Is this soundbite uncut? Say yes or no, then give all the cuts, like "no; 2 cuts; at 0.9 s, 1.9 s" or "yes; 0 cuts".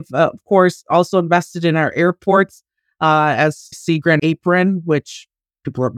no; 2 cuts; at 3.7 s, 4.2 s